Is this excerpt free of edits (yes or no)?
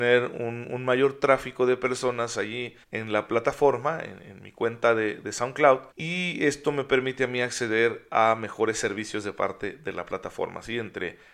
no